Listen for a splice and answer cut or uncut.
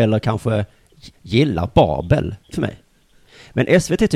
cut